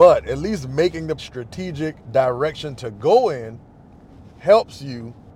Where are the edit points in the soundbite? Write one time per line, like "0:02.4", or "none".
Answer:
0:01.2
0:02.0